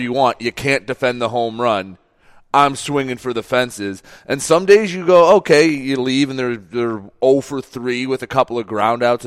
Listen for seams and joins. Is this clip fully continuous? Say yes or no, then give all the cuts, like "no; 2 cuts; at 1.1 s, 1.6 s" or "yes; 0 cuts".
yes; 0 cuts